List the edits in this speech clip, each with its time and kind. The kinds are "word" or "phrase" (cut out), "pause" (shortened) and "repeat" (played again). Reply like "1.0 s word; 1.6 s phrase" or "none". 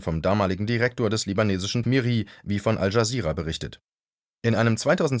1.8 s phrase